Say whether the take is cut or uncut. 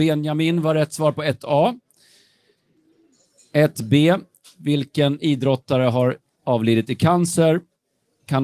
uncut